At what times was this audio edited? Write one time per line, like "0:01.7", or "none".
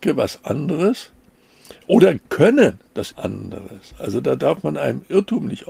0:02.2
0:03.1